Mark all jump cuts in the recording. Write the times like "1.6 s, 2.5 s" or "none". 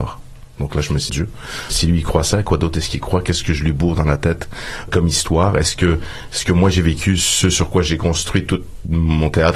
1.1 s, 1.7 s, 4.9 s